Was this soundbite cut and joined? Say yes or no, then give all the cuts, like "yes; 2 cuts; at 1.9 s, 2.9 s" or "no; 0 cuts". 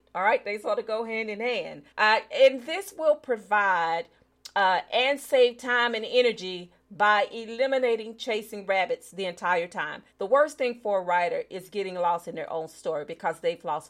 yes; 2 cuts; at 1.9 s, 10.1 s